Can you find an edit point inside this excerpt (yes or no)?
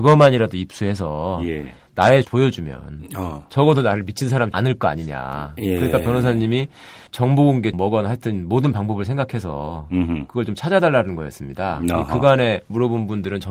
yes